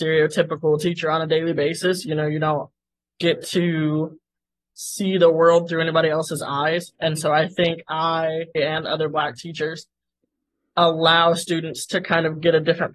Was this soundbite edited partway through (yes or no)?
yes